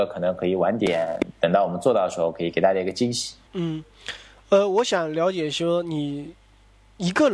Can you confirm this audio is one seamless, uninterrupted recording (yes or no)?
no